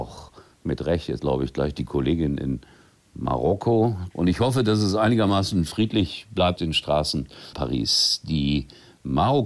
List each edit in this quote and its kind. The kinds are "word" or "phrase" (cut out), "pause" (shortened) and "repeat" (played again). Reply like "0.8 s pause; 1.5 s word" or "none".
1.2 s word; 4.1 s phrase; 6.6 s word; 7.5 s word

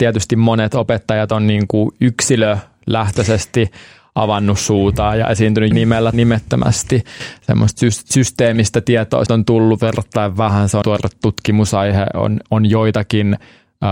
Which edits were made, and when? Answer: 5.7 s word; 6.1 s word; 9.3 s word; 10.8 s word

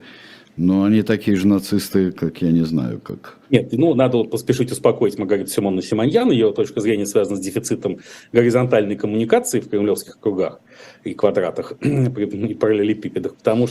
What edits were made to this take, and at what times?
3.4 s pause

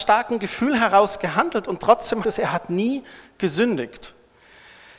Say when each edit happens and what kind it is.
2.2 s word

